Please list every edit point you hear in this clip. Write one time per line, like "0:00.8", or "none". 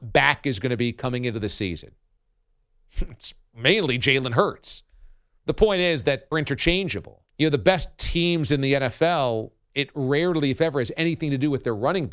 0:06.3
0:07.3